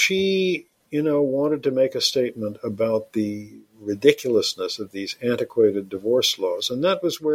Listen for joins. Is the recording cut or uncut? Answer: uncut